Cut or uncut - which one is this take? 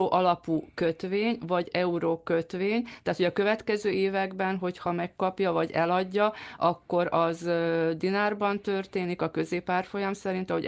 uncut